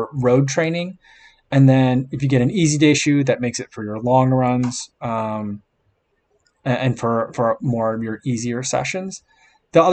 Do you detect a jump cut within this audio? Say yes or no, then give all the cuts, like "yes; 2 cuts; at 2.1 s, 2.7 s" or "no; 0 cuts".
no; 0 cuts